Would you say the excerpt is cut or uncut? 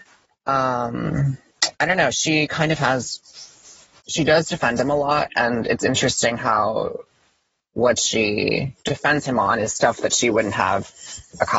cut